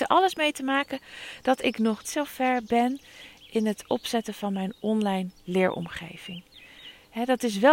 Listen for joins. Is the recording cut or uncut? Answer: cut